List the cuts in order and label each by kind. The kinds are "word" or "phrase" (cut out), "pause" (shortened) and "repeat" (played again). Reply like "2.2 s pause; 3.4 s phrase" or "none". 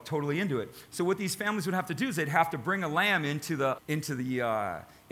3.8 s word